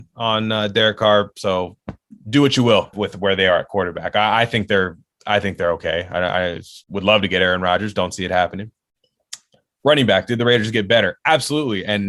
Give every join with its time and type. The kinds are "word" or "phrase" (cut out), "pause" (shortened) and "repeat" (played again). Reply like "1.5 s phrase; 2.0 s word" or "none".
2.2 s pause; 2.9 s word; 6.8 s pause